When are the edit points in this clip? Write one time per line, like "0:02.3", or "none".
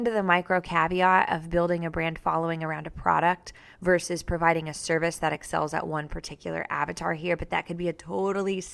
none